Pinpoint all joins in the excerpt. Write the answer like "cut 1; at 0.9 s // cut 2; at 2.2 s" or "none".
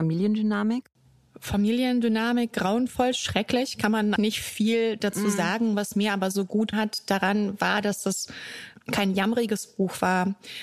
cut 1; at 4.2 s // cut 2; at 6.7 s